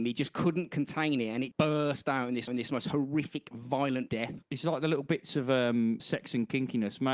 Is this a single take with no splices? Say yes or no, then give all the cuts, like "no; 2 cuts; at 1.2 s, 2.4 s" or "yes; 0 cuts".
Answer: no; 5 cuts; at 1.5 s, 2.5 s, 4.1 s, 4.4 s, 6.0 s